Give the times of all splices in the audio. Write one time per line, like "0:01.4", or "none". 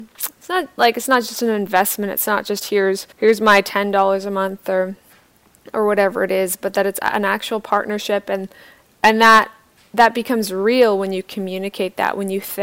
0:03.1